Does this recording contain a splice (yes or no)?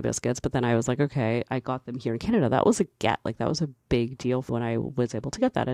yes